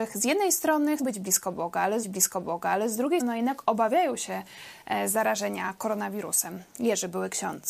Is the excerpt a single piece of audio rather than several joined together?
no; 3 cuts; at 1.0 s, 2.0 s, 3.2 s

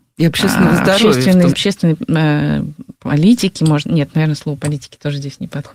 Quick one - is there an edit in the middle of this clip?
yes; 1 cut; at 1.5 s

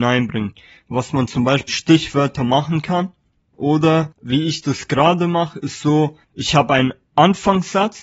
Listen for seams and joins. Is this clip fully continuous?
no; 3 cuts; at 1.7 s, 4.1 s, 6.2 s

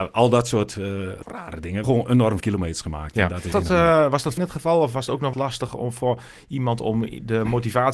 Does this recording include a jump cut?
yes; 6 cuts; at 1.2 s, 1.8 s, 2.4 s, 3.5 s, 4.4 s, 5.3 s

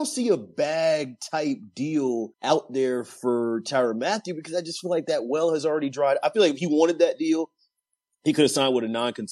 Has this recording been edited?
yes; 1 cut; at 2.3 s

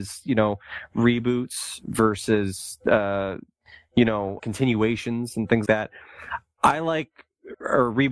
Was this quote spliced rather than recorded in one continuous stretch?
yes; 2 cuts; at 4.4 s, 5.7 s

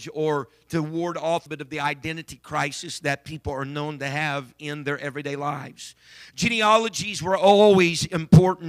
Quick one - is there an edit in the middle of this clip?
yes; 1 cut; at 1.5 s

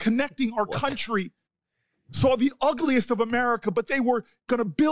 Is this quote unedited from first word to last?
yes; 0 cuts

